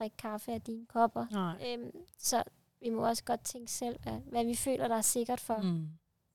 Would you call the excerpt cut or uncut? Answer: uncut